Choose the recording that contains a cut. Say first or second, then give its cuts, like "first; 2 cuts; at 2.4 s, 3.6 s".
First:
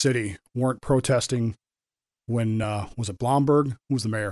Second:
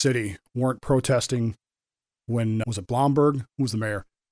second; 1 cut; at 2.6 s